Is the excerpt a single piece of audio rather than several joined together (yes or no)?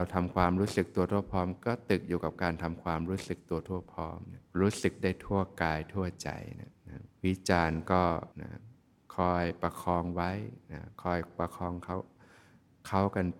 no